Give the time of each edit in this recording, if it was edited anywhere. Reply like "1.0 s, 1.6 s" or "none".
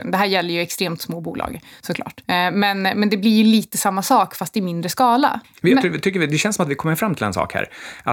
none